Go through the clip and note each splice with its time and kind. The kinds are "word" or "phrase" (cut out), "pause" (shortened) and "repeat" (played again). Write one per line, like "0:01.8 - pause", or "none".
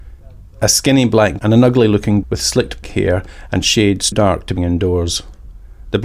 0:01.4 - word
0:02.2 - word
0:02.8 - word
0:04.1 - word
0:04.6 - word